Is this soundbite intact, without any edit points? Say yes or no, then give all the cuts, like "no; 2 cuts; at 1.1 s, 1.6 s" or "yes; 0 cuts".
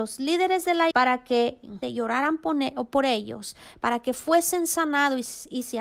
no; 2 cuts; at 0.9 s, 1.8 s